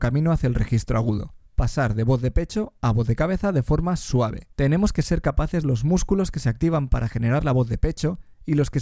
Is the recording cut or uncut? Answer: cut